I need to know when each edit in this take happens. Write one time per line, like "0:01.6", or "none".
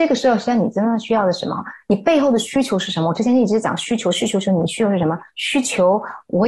0:05.3